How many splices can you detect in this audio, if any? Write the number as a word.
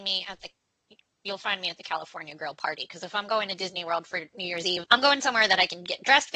one